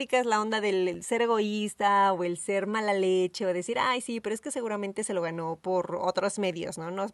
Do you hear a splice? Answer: no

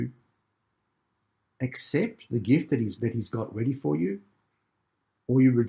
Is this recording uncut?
no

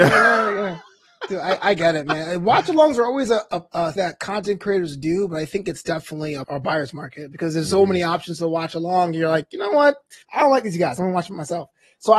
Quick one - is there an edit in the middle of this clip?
yes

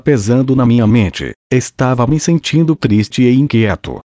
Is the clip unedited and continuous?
no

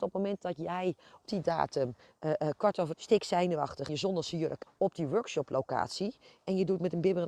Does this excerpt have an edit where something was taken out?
yes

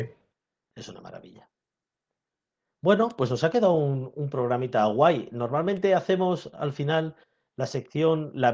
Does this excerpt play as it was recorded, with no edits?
yes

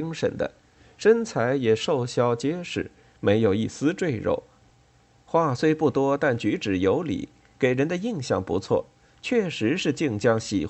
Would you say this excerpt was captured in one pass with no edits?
yes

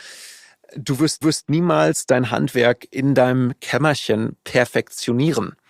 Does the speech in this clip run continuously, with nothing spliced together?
no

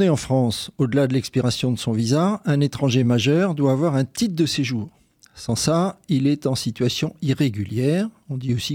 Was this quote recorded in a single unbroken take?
yes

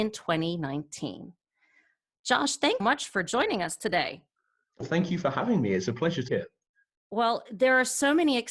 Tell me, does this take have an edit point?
yes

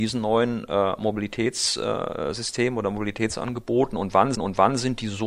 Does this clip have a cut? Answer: yes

